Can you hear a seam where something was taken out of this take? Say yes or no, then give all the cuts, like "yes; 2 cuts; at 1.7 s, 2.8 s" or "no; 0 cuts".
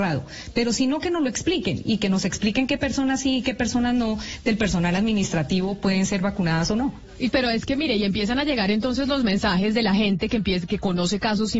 no; 0 cuts